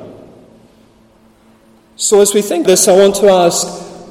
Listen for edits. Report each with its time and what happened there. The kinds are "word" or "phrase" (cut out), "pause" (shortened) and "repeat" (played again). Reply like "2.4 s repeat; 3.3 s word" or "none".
2.6 s word